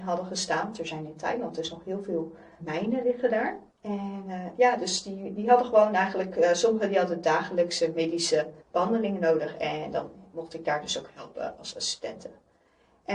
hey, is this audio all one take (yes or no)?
no